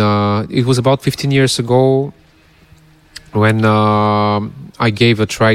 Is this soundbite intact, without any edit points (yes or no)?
yes